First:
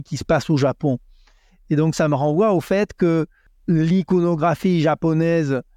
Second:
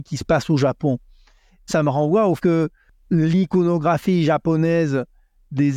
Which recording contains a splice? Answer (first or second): second